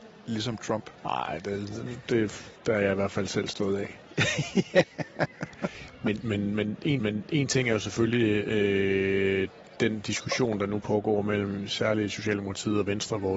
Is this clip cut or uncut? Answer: cut